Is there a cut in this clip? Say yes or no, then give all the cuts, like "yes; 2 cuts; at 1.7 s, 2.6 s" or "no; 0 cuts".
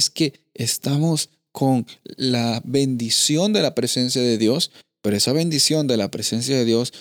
no; 0 cuts